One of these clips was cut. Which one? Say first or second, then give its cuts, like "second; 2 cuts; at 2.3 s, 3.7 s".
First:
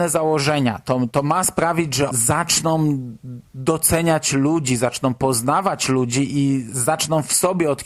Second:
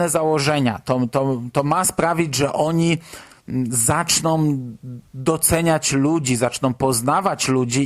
first; 2 cuts; at 1.1 s, 2.1 s